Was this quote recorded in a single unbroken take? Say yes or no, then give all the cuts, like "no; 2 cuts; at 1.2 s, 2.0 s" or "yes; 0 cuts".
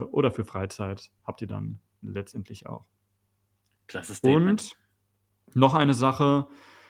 yes; 0 cuts